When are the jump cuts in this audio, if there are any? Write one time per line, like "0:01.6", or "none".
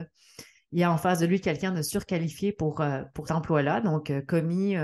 0:03.3